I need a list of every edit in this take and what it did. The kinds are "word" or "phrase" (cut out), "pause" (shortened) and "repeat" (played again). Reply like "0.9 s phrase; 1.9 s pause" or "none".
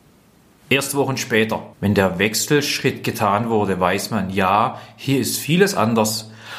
1.7 s pause

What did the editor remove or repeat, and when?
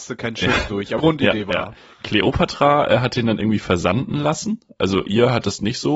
1.0 s word; 1.5 s word; 5.1 s word

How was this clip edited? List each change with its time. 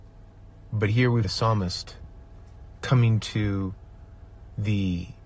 1.2 s word

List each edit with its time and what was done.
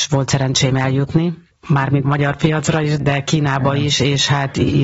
2.0 s phrase; 3.0 s word

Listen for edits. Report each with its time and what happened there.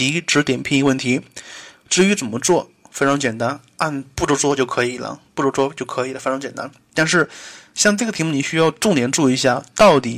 5.3 s pause

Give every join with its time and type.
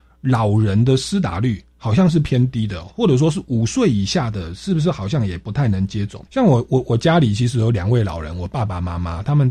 6.3 s pause

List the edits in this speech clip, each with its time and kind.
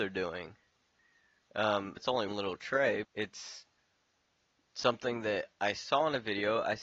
2.0 s word; 2.3 s word; 3.0 s word

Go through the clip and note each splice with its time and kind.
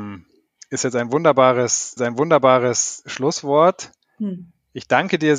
2.0 s repeat

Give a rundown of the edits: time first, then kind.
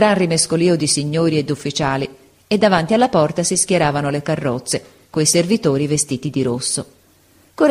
none

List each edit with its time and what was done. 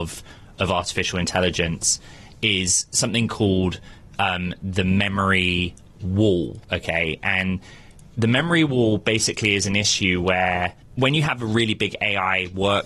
6.6 s pause

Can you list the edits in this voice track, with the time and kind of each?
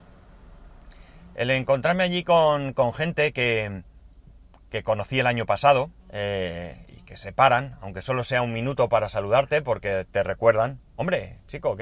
6.0 s pause

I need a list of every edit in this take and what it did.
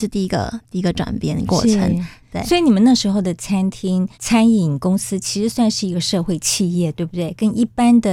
4.1 s pause

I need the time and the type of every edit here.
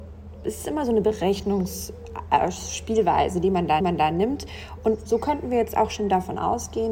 3.8 s repeat

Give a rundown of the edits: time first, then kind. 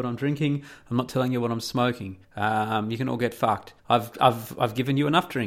2.2 s pause; 3.8 s pause

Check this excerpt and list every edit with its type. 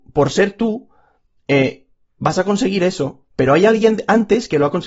none

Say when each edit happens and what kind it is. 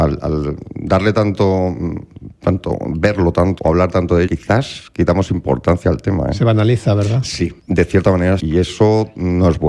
3.6 s word; 4.3 s word; 7.6 s pause; 8.4 s word

